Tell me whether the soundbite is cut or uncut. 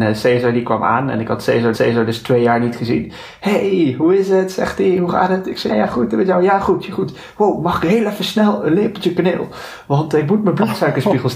cut